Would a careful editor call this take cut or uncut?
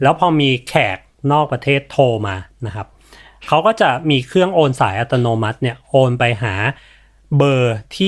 uncut